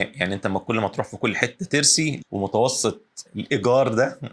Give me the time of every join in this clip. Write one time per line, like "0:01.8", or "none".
0:02.2
0:03.3